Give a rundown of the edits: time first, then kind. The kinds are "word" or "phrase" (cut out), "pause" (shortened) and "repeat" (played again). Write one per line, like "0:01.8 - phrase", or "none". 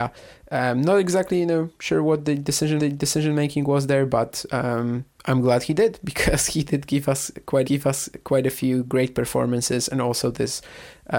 0:02.8 - repeat
0:05.1 - pause
0:07.6 - repeat